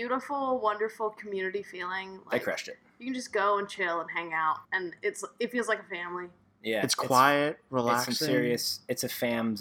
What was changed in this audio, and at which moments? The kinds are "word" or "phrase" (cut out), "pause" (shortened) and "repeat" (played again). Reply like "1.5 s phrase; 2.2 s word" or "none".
4.6 s pause